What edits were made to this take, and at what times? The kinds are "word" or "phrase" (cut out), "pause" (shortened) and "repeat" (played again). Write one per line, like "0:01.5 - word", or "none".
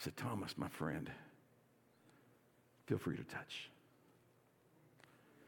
none

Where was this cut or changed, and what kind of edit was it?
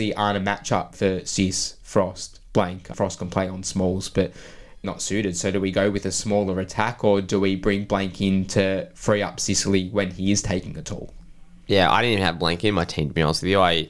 0:00.9 - word
0:02.9 - word
0:04.8 - word
0:11.6 - pause

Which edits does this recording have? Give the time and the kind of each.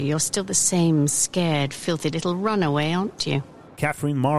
none

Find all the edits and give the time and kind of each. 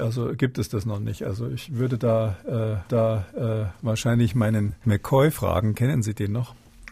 0:02.9 - repeat
0:04.8 - phrase

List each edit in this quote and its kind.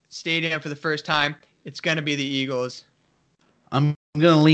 none

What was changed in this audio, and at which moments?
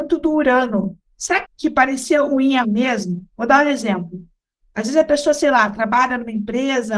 0:01.4 - word
0:02.6 - word
0:03.3 - pause

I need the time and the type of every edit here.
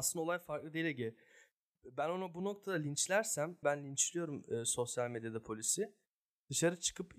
0:03.6 - word

